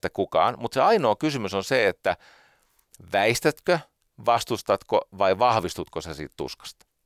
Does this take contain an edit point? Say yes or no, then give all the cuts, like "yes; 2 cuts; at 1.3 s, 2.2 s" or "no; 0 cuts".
no; 0 cuts